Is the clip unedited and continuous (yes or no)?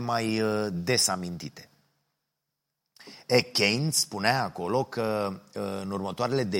yes